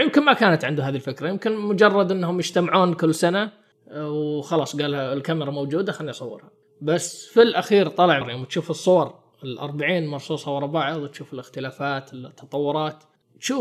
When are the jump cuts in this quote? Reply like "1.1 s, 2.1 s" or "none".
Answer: 8.2 s